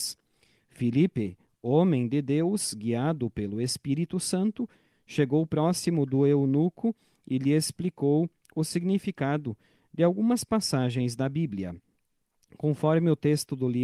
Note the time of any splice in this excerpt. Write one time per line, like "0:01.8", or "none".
none